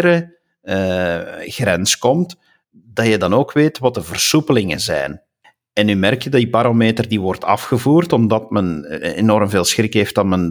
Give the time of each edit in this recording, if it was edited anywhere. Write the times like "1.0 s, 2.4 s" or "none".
none